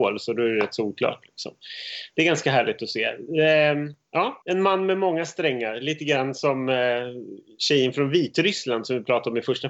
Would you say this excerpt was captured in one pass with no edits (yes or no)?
no